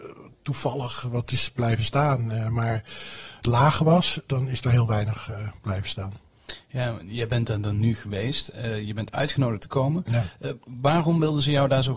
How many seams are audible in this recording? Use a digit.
2